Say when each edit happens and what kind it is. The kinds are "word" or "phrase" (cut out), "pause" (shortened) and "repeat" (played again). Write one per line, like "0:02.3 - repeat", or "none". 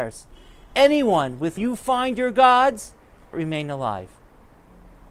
0:01.6 - word
0:03.3 - phrase